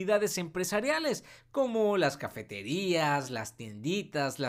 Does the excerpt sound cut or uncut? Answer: uncut